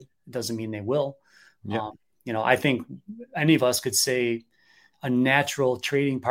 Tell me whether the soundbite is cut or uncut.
uncut